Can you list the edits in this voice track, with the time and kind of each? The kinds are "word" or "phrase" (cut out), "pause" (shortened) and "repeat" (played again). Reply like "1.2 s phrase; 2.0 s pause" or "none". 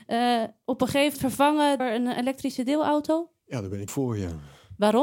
1.1 s word; 1.8 s word; 3.9 s word